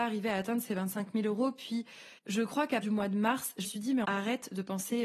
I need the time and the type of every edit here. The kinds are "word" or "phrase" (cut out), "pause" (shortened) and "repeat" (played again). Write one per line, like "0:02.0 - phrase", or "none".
0:02.2 - pause
0:02.8 - word
0:03.6 - word
0:04.0 - phrase